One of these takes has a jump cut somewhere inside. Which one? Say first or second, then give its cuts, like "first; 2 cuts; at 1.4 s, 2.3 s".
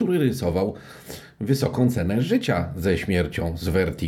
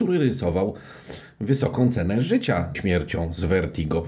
second; 1 cut; at 2.7 s